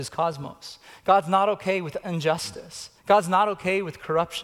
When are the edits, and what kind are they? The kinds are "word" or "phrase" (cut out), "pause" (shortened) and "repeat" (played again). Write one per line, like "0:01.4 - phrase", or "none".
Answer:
0:03.0 - pause